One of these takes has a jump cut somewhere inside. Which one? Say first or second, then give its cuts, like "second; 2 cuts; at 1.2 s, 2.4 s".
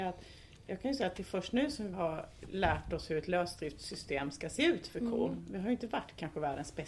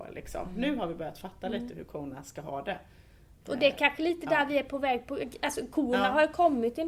first; 1 cut; at 1.9 s